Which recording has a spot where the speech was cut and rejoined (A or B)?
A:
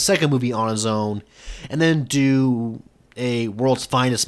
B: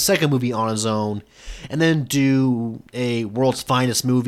B